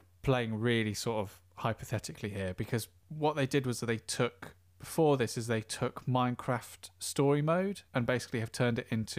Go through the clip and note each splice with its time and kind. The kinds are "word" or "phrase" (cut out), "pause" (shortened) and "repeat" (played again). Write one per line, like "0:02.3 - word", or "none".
0:07.9 - pause